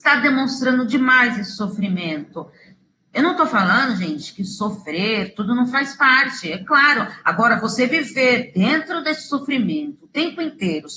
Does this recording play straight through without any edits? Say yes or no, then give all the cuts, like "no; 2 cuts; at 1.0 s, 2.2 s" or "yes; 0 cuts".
yes; 0 cuts